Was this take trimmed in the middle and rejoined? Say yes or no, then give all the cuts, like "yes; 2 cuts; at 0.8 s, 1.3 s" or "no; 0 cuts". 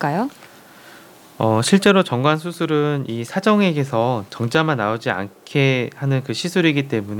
no; 0 cuts